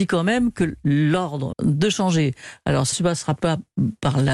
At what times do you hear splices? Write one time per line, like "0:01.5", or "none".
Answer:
0:01.5
0:02.9
0:03.4